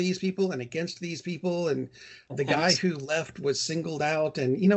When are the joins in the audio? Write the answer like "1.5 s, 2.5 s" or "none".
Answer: none